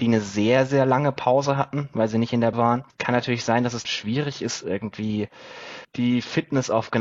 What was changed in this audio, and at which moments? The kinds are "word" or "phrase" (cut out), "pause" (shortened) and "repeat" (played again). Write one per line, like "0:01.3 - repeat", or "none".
0:02.5 - word
0:03.8 - word